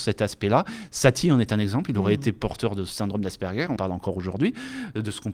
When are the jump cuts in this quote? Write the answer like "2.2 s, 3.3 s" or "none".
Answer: 3.8 s